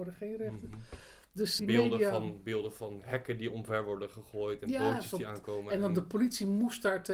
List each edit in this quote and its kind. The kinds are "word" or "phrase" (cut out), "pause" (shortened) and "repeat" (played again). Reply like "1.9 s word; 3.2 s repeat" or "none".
1.6 s word